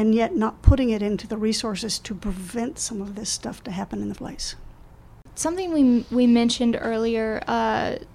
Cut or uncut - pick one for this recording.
cut